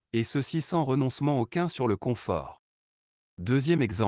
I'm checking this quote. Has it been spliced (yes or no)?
no